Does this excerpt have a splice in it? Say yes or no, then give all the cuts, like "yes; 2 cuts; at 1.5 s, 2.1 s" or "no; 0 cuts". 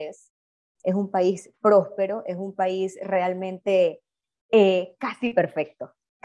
no; 0 cuts